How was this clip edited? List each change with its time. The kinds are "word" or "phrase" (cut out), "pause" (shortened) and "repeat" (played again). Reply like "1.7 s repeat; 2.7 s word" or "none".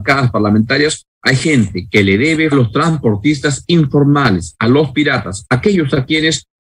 2.5 s phrase